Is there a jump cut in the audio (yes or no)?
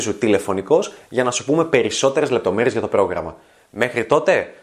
no